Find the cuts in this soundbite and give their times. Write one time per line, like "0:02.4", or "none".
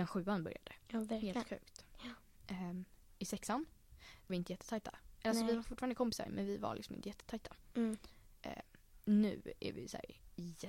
0:04.3